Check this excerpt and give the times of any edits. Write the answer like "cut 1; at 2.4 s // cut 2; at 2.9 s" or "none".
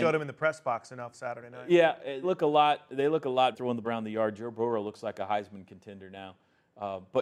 cut 1; at 1.1 s // cut 2; at 2.2 s // cut 3; at 3.5 s // cut 4; at 3.8 s